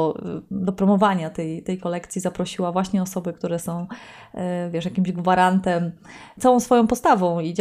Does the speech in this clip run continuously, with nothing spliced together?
yes; 0 cuts

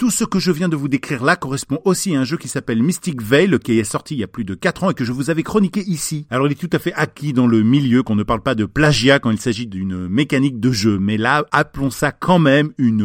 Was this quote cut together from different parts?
no; 0 cuts

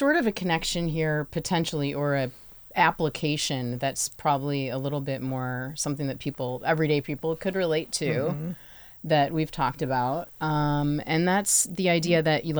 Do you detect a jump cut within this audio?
no; 0 cuts

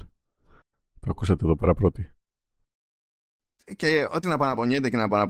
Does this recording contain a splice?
yes; 1 cut; at 4.2 s

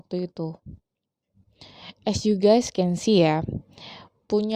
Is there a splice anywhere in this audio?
no; 0 cuts

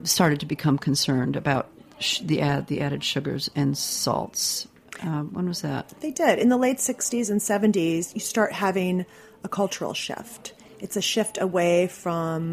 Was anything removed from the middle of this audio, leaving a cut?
no; 0 cuts

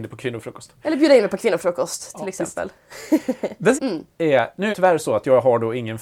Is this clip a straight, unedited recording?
no; 2 cuts; at 3.8 s, 4.7 s

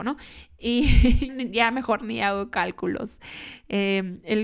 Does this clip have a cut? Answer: yes; 1 cut; at 1.3 s

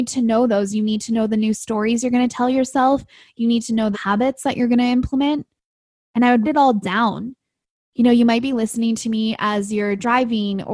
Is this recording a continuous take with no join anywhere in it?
no; 2 cuts; at 3.9 s, 6.4 s

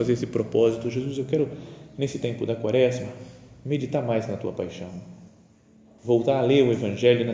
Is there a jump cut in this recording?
no; 0 cuts

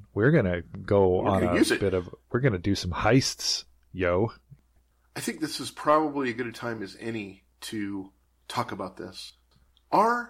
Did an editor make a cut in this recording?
no; 0 cuts

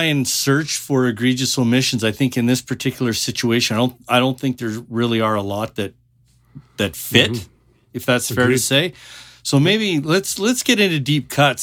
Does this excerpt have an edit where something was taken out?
no; 0 cuts

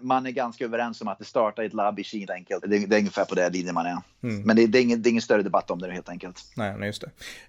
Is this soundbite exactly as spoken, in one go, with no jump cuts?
no; 3 cuts; at 1.2 s, 2.3 s, 2.6 s

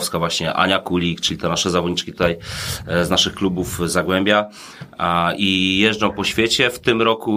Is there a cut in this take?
no; 0 cuts

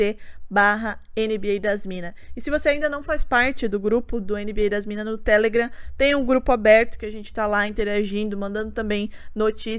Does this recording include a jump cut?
no; 0 cuts

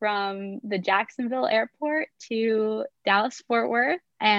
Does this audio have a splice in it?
yes; 1 cut; at 3.0 s

